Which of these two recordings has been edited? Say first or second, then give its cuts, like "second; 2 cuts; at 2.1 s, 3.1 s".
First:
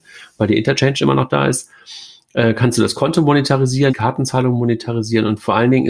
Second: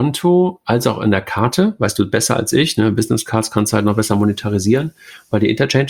first; 1 cut; at 3.9 s